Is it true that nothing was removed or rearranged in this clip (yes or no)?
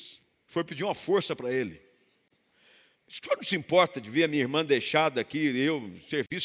yes